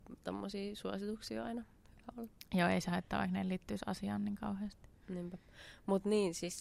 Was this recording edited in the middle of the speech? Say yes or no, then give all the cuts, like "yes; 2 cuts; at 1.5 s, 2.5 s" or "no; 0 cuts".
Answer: no; 0 cuts